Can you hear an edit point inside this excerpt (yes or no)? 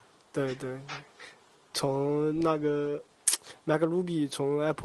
no